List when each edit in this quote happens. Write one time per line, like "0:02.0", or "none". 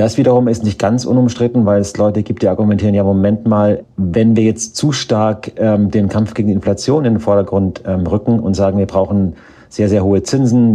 none